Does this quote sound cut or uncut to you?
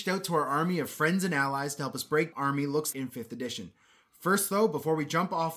cut